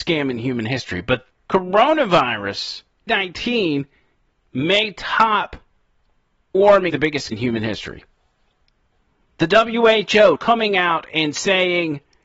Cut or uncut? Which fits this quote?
cut